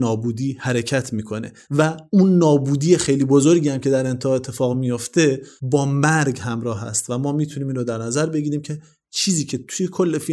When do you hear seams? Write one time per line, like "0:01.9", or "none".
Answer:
none